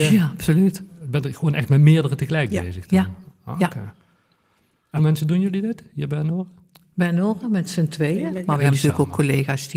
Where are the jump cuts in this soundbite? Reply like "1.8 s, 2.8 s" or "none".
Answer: 5.0 s